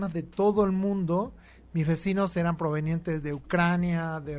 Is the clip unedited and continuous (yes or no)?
yes